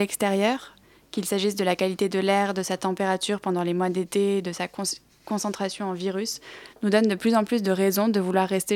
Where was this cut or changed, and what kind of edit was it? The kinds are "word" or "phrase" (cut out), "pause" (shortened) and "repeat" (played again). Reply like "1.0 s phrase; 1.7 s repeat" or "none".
none